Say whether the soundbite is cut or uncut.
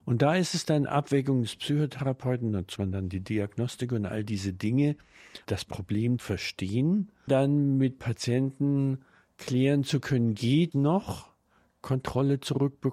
cut